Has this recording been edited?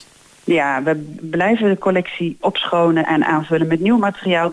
yes; 3 cuts; at 1.2 s, 2.4 s, 3.0 s

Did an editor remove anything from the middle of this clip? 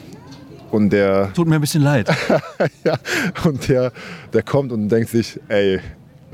no; 0 cuts

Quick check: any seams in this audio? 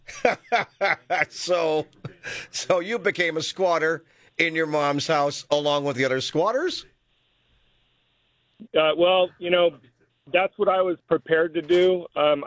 no; 0 cuts

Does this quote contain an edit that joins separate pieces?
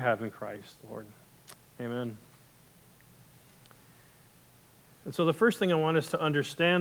no; 0 cuts

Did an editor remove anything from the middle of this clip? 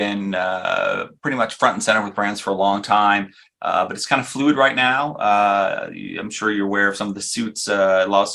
no; 0 cuts

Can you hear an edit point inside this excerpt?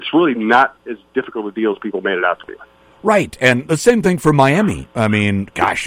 no; 0 cuts

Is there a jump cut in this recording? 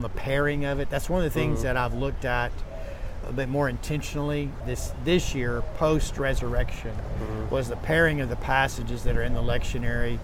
yes; 2 cuts; at 3.2 s, 4.6 s

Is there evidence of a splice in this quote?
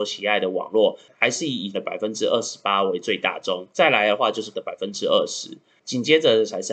yes; 3 cuts; at 1.7 s, 3.7 s, 4.5 s

